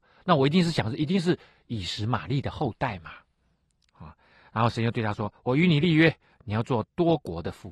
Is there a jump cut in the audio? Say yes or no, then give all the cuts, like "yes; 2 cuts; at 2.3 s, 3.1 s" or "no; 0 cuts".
no; 0 cuts